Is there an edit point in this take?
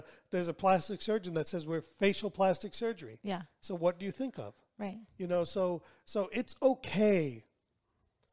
no; 0 cuts

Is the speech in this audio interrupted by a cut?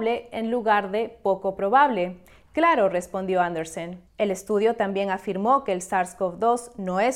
yes; 1 cut; at 4.1 s

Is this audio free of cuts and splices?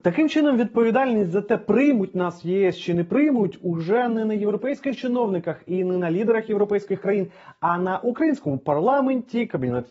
yes; 0 cuts

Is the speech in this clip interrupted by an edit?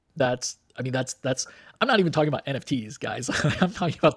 no; 0 cuts

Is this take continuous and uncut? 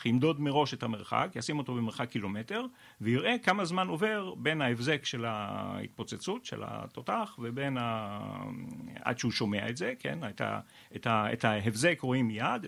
yes; 0 cuts

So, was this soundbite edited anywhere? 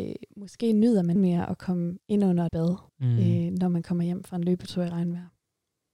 yes; 4 cuts; at 1.2 s, 2.0 s, 2.5 s, 2.9 s

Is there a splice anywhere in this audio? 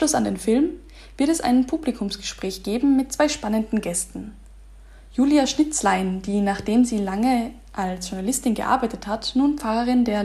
no; 0 cuts

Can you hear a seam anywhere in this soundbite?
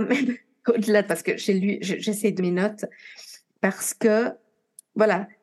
yes; 2 cuts; at 1.1 s, 2.4 s

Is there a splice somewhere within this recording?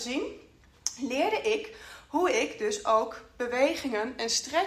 no; 0 cuts

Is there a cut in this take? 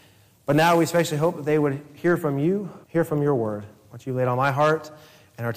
yes; 1 cut; at 2.8 s

